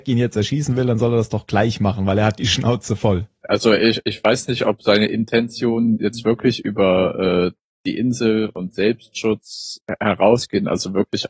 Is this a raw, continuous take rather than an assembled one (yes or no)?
yes